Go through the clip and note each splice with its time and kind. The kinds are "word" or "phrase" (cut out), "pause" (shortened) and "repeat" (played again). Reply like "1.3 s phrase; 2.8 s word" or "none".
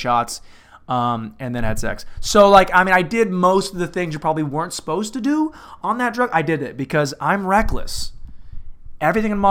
none